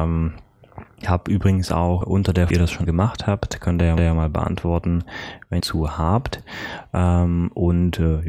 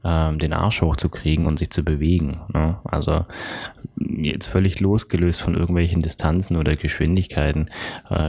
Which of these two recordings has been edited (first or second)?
first